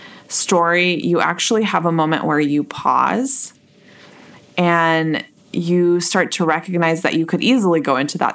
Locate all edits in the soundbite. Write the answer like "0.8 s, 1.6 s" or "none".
5.4 s